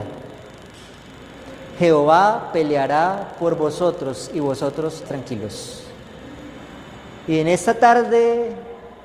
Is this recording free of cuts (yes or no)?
no